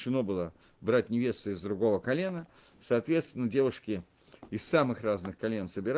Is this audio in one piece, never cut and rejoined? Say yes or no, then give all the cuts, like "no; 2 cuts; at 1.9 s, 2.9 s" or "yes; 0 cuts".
yes; 0 cuts